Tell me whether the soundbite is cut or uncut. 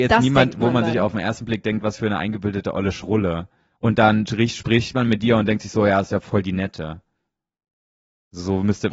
uncut